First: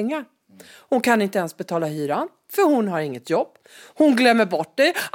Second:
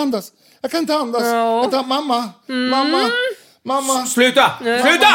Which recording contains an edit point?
second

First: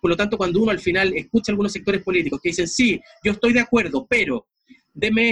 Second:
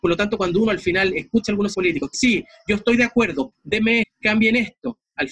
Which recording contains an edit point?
second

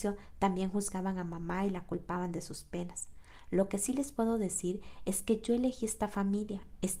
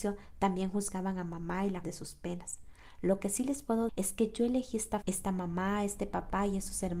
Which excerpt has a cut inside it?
second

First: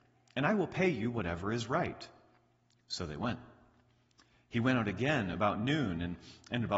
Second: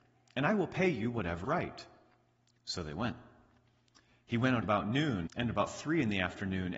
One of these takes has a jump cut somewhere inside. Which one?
second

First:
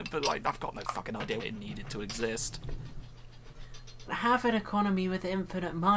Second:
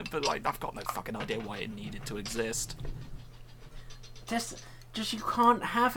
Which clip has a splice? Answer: first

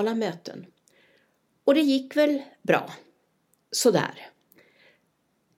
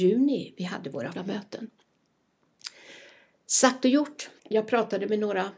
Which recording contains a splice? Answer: second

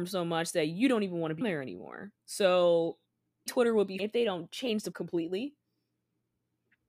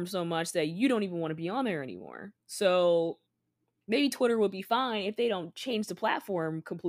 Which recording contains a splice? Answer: first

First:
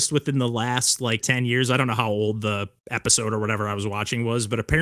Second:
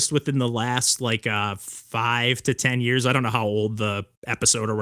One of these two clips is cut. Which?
first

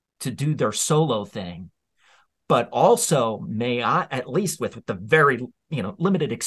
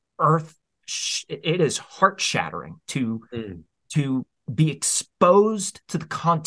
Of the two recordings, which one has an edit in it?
second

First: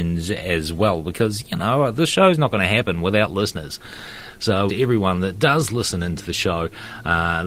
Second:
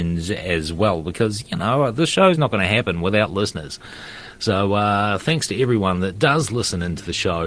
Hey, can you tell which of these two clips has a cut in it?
first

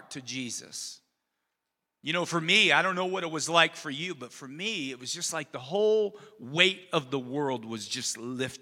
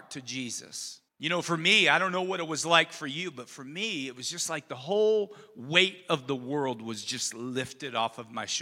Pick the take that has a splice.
second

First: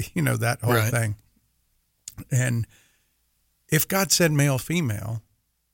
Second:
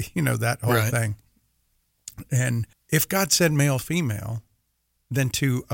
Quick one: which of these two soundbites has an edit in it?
second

